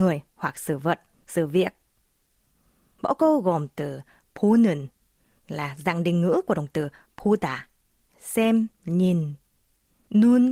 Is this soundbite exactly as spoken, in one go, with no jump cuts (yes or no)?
yes